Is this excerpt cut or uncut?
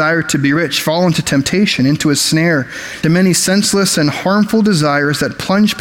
cut